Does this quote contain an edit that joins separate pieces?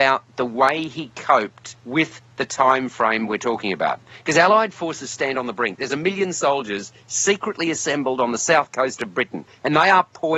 yes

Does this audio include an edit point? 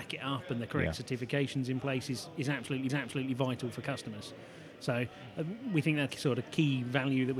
yes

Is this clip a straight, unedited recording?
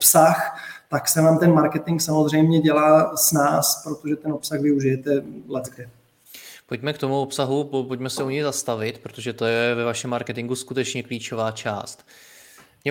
yes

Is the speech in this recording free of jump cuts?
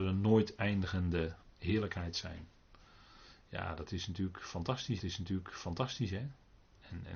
no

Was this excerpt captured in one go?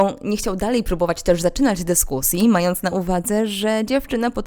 yes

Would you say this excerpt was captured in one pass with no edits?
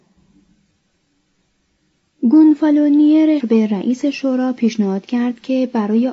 no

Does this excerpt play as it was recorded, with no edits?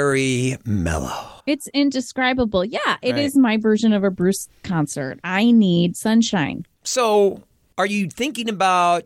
no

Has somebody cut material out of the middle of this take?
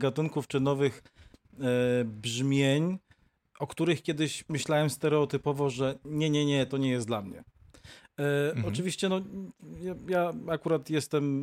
no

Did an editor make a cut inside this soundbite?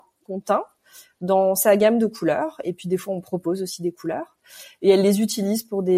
no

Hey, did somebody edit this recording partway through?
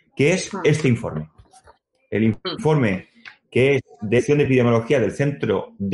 no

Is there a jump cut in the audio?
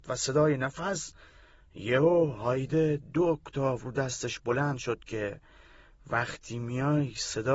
no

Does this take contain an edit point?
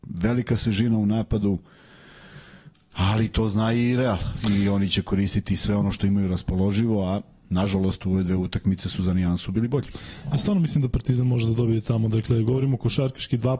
no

